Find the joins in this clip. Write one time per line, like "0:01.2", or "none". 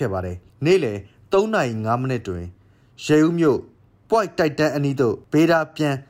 none

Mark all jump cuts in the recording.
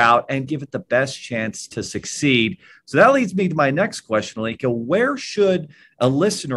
none

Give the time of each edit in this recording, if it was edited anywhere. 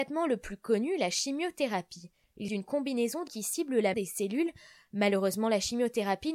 0:02.5
0:03.3
0:03.9

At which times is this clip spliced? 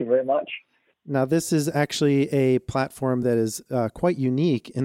none

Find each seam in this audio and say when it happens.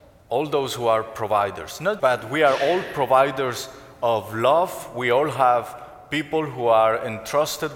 0:02.0

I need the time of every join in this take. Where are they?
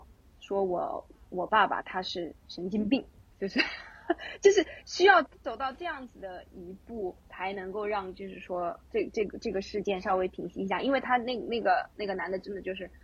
0:02.4
0:03.3
0:07.2
0:08.8

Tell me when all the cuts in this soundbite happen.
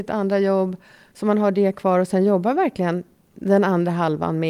none

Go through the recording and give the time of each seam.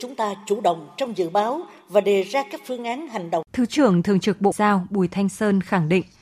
0:03.5
0:04.5

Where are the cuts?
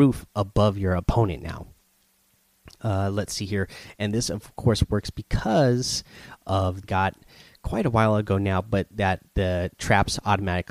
0:06.8

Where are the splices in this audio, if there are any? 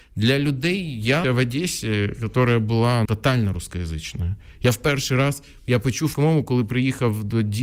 0:01.2
0:03.1
0:06.1

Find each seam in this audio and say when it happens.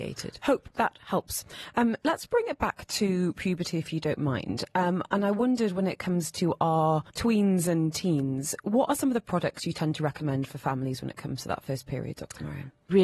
0:07.1

